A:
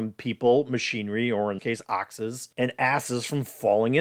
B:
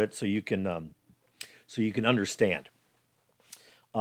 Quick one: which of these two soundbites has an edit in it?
A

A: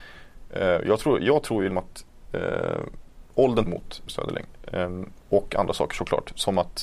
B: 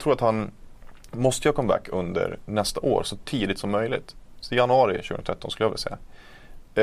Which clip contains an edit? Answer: A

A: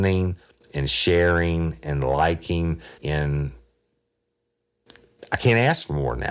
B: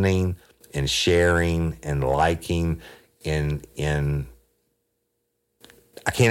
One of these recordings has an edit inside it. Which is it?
A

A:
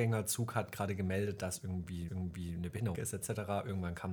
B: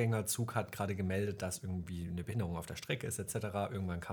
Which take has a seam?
A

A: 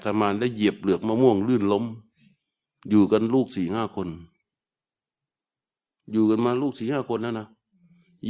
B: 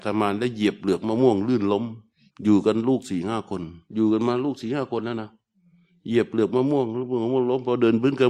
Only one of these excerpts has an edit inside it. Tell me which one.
B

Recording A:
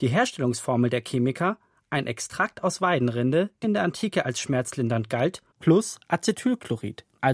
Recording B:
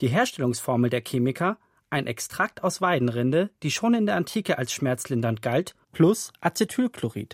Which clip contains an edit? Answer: A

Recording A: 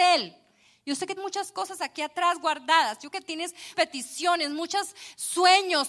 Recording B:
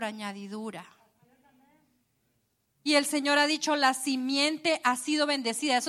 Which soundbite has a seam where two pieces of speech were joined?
A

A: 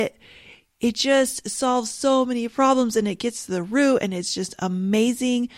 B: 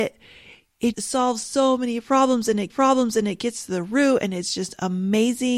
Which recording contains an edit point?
B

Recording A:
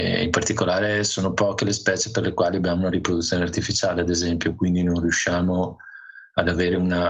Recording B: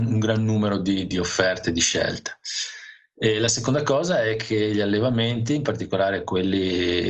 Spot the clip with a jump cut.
B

